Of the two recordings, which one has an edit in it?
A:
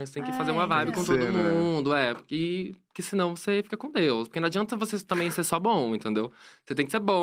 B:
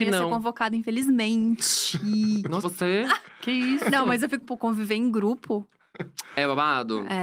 B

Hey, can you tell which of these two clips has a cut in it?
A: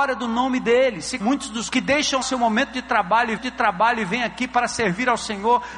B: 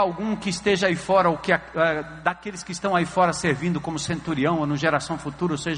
A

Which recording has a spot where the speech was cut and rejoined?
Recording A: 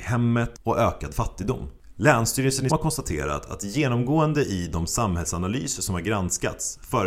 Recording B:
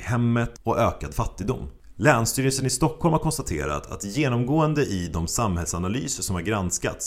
A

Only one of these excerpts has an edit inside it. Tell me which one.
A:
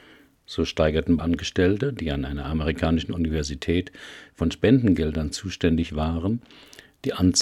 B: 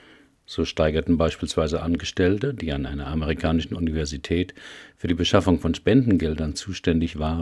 A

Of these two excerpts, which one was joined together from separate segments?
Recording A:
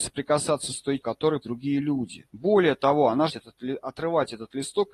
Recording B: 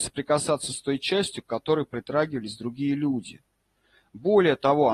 A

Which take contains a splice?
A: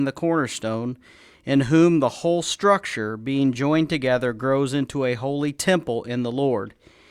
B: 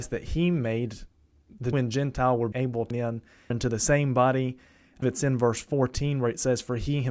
B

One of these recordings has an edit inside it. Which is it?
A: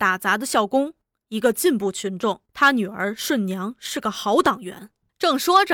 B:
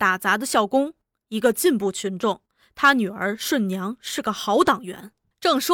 A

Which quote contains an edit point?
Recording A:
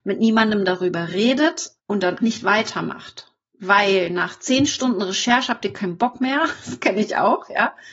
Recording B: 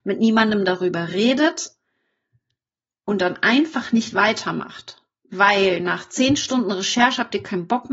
A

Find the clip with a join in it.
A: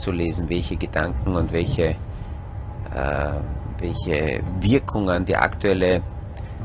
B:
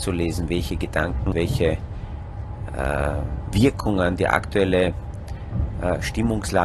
B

